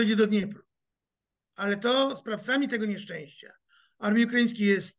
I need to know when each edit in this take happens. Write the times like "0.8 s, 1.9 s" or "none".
none